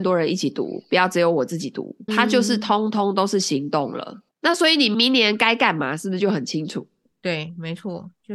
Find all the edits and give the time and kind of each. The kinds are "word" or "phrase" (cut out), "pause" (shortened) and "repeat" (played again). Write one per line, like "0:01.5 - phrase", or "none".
0:02.1 - word
0:04.3 - pause